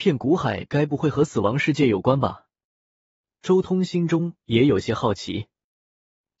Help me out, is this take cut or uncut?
uncut